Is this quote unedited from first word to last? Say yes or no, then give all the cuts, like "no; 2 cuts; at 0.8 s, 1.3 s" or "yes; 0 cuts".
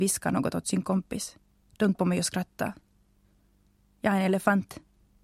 no; 1 cut; at 1.9 s